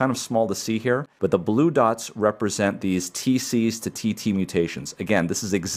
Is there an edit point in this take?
no; 0 cuts

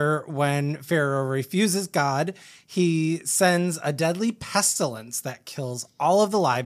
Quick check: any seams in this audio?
no; 0 cuts

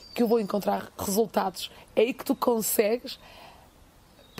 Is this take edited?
no; 0 cuts

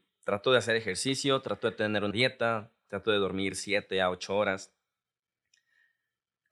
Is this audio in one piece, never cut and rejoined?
no; 1 cut; at 2.1 s

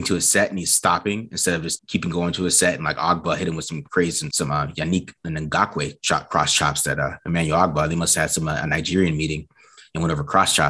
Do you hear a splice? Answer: yes; 2 cuts; at 1.8 s, 4.3 s

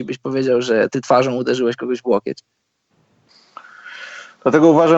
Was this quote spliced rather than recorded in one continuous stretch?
no; 0 cuts

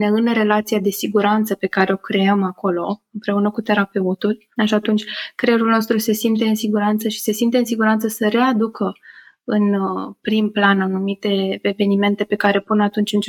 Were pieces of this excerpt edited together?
yes; 1 cut; at 4.6 s

